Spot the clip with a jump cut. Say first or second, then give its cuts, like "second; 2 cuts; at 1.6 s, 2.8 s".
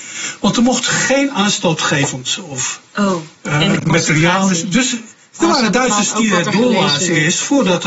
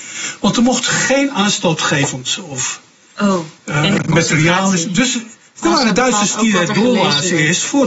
first; 1 cut; at 2.9 s